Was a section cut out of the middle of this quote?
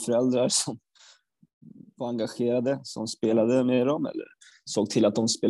no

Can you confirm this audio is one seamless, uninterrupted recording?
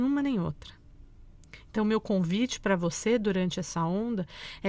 yes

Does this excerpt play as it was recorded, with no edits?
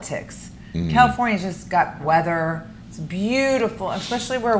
no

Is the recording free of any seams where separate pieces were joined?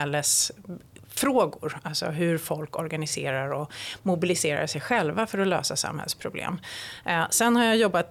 yes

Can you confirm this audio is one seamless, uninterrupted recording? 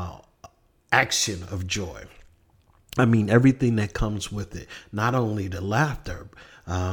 yes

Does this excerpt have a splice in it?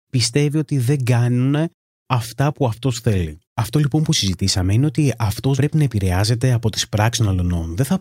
yes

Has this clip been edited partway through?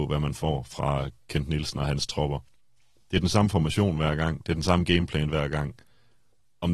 no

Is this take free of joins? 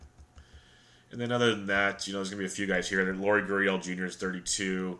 yes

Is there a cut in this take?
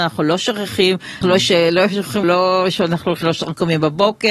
yes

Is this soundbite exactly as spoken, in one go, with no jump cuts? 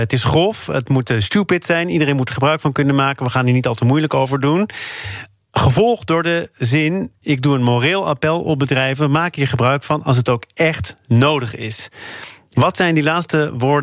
yes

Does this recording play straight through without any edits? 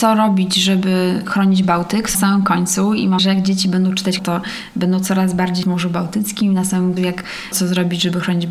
no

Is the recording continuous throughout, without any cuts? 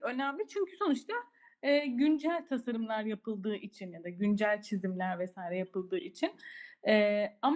yes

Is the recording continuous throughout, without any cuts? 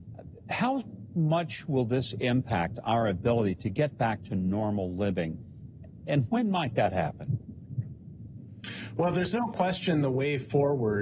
yes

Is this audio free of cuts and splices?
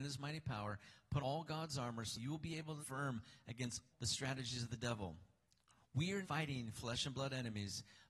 no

